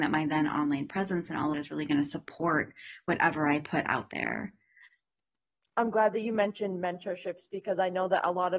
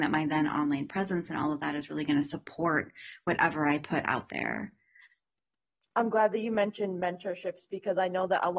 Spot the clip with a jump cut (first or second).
first